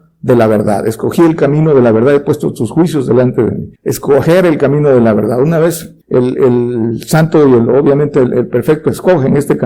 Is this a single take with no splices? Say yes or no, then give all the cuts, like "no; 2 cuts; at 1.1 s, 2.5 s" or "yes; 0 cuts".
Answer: no; 2 cuts; at 3.8 s, 6.0 s